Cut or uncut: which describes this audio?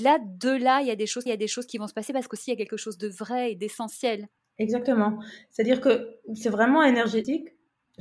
cut